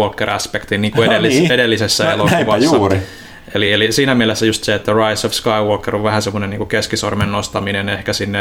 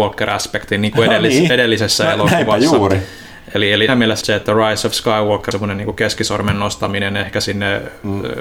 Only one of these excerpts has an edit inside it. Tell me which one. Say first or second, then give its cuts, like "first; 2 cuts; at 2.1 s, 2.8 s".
second; 3 cuts; at 3.9 s, 4.2 s, 5.5 s